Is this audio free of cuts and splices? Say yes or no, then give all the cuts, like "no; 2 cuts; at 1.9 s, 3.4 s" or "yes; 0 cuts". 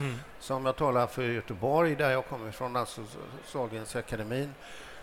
yes; 0 cuts